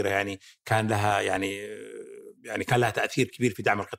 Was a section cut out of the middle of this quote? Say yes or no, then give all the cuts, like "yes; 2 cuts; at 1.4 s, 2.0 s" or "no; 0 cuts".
yes; 1 cut; at 2.4 s